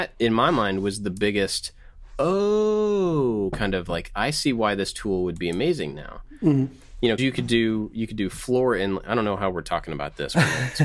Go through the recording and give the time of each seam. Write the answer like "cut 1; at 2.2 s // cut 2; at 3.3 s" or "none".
cut 1; at 7.2 s